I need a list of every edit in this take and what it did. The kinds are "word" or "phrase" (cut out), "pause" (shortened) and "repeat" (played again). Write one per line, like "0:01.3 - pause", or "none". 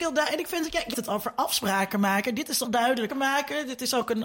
0:00.9 - word
0:02.6 - word
0:03.1 - word